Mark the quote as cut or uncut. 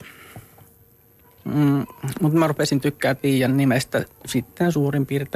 uncut